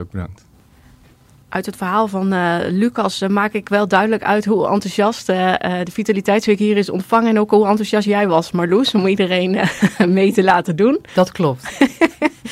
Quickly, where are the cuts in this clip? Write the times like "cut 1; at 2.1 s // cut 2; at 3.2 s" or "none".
none